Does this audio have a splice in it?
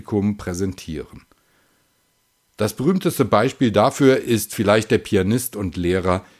no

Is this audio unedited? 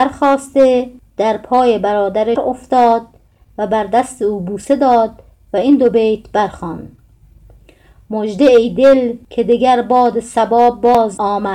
no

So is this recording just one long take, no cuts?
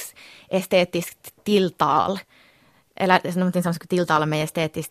yes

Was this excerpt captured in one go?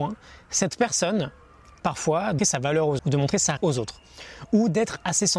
no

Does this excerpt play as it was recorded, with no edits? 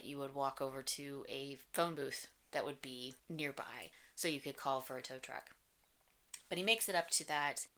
yes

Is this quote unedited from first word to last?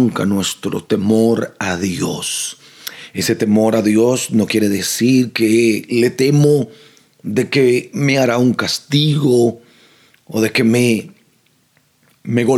yes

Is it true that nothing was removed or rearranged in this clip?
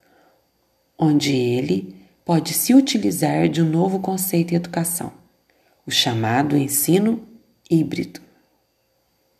yes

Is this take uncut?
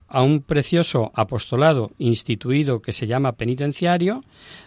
no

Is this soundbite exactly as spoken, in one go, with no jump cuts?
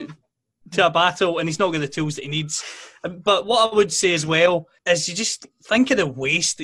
no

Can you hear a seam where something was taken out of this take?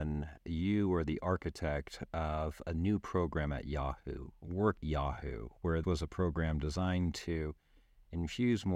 yes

